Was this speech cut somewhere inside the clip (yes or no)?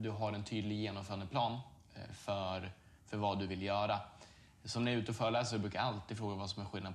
no